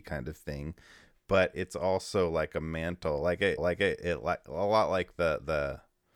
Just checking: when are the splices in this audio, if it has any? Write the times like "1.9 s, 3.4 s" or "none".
3.6 s